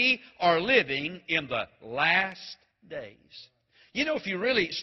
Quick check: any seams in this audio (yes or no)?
yes